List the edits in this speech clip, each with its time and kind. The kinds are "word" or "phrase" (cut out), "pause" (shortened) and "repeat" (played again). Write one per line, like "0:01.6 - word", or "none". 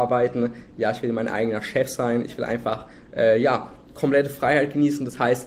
none